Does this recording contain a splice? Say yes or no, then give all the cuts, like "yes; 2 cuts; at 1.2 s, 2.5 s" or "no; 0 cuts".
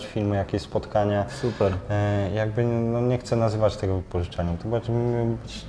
no; 0 cuts